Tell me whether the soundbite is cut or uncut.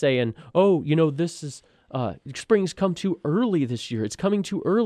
uncut